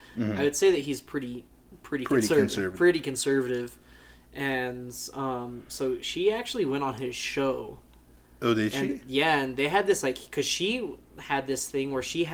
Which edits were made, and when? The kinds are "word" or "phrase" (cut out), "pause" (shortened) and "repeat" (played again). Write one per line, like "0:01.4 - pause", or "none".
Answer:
none